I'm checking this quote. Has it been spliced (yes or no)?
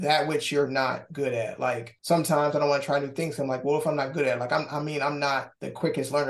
no